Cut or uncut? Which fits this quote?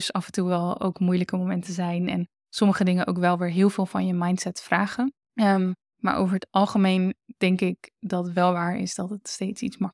cut